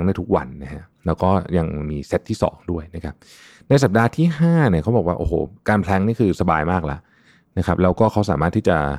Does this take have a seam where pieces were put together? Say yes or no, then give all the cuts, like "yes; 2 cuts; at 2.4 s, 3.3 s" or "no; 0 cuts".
yes; 1 cut; at 0.9 s